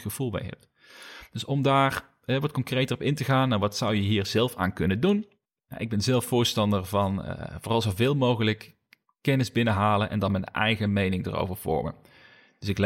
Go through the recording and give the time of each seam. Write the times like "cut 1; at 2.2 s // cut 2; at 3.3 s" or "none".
none

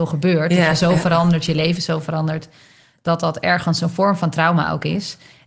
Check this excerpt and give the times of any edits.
none

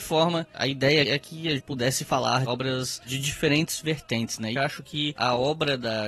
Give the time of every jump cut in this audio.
cut 1; at 1.0 s // cut 2; at 1.6 s // cut 3; at 2.5 s // cut 4; at 4.5 s

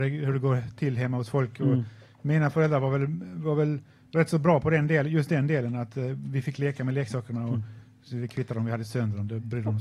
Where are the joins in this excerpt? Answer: none

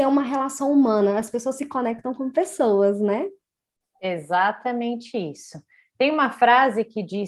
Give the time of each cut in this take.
none

